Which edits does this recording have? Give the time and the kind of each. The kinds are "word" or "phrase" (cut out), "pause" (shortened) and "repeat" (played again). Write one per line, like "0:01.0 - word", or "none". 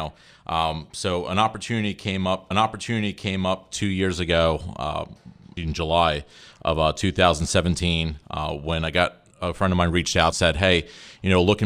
0:02.5 - repeat
0:05.6 - word
0:09.3 - pause
0:10.3 - phrase